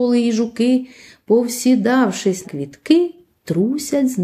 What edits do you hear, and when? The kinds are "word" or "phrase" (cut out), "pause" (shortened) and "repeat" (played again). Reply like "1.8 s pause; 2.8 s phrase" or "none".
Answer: 2.4 s word